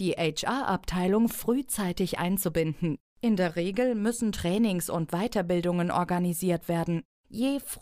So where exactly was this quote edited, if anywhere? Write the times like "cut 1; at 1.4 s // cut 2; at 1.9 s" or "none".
none

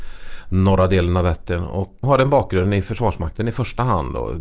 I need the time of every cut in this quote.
cut 1; at 2.0 s

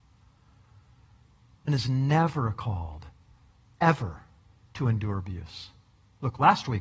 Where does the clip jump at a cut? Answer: cut 1; at 1.7 s

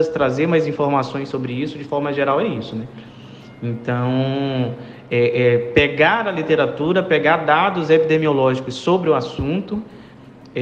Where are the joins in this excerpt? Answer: none

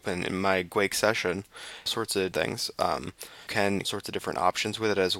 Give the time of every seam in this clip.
cut 1; at 1.9 s // cut 2; at 2.3 s // cut 3; at 3.5 s // cut 4; at 3.8 s

